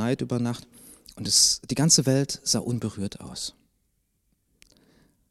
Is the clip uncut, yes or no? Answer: yes